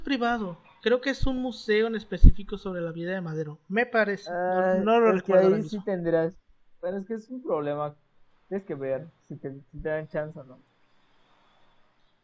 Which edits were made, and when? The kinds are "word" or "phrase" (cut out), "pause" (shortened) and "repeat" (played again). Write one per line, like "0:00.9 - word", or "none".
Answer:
none